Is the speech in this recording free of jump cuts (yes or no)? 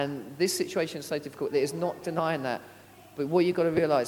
yes